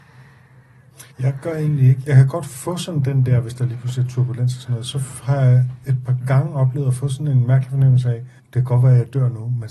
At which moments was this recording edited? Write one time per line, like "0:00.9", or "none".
0:01.1
0:08.4